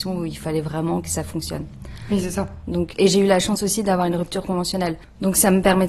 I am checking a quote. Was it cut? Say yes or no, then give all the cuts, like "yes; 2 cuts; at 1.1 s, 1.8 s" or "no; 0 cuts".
yes; 1 cut; at 2.9 s